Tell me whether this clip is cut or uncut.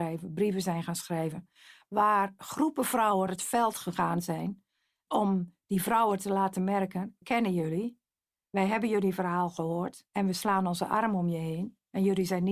cut